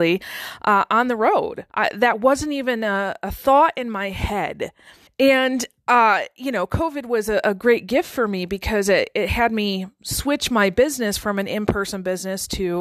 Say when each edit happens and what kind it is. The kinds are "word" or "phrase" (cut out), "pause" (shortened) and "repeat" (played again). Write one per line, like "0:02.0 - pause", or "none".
0:01.7 - pause
0:05.1 - pause